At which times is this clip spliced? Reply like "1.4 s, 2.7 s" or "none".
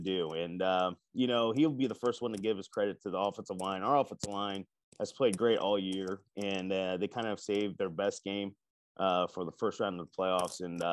none